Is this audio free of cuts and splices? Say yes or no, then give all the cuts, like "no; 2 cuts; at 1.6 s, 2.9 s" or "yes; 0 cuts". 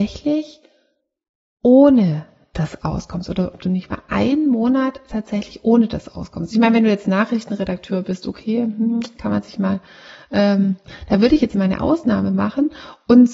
yes; 0 cuts